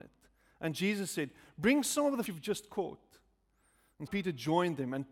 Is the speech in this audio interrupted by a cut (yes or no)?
yes